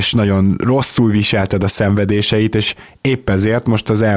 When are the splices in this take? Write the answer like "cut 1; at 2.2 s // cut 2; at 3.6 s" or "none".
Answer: none